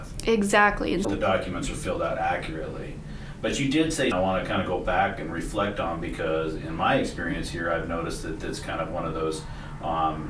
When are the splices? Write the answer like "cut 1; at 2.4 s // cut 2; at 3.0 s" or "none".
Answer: cut 1; at 1.0 s // cut 2; at 4.1 s